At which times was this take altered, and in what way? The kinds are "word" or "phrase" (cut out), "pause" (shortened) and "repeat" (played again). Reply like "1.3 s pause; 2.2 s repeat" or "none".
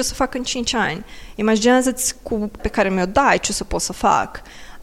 2.6 s word